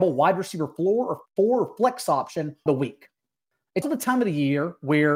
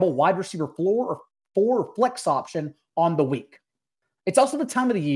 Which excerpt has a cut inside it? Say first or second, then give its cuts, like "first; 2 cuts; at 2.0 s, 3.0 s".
first; 3 cuts; at 1.3 s, 2.7 s, 3.8 s